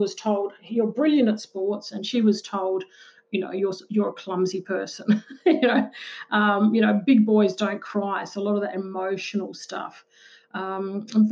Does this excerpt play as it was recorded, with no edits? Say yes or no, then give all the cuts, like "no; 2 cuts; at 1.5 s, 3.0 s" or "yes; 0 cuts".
yes; 0 cuts